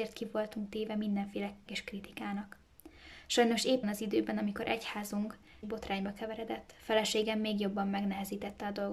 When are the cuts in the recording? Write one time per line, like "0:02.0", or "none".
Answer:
0:01.7
0:03.8
0:05.6